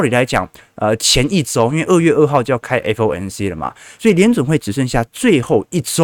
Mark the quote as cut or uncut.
uncut